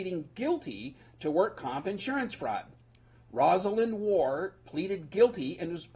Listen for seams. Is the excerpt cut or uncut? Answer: uncut